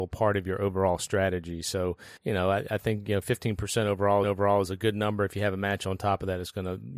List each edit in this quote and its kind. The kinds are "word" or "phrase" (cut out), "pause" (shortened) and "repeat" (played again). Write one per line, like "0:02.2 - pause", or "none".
0:02.2 - pause
0:04.2 - repeat